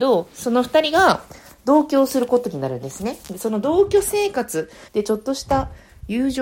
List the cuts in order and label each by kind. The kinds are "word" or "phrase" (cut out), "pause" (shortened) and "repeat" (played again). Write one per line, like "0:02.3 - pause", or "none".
0:04.9 - pause

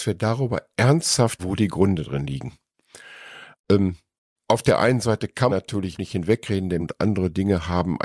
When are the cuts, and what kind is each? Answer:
0:01.4 - word
0:04.1 - pause
0:05.5 - word
0:05.9 - word
0:06.8 - word

